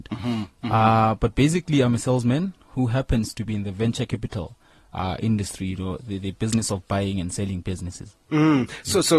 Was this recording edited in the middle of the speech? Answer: no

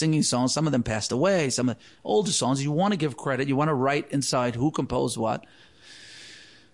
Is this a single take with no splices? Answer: yes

